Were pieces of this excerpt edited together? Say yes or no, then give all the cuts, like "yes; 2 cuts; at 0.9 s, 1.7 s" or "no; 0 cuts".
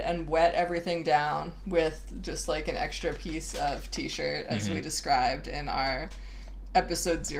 no; 0 cuts